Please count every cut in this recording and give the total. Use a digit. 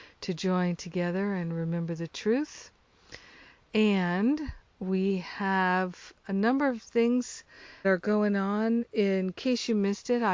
2